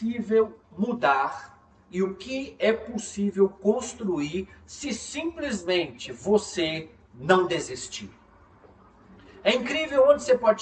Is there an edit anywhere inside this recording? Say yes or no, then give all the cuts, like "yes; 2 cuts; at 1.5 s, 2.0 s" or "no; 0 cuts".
no; 0 cuts